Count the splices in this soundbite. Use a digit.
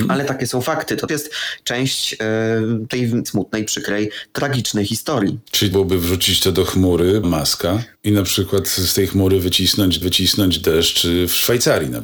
5